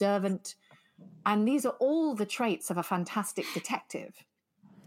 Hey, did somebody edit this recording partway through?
no; 0 cuts

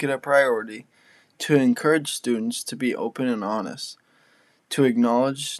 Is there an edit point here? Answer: no; 0 cuts

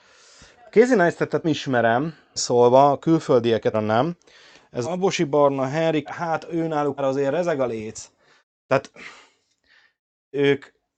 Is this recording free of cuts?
no; 6 cuts; at 1.4 s, 2.4 s, 3.7 s, 4.8 s, 6.1 s, 7.0 s

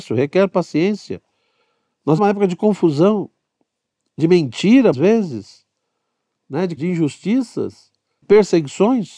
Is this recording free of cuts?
no; 4 cuts; at 2.2 s, 4.9 s, 6.8 s, 8.2 s

